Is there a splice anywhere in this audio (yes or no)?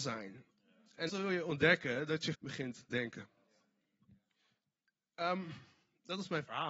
yes